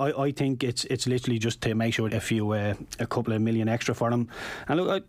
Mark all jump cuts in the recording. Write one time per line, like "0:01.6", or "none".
0:02.1